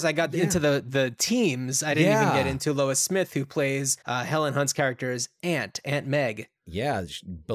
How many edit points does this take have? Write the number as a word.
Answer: one